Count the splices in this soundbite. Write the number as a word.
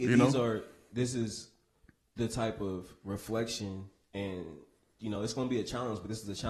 zero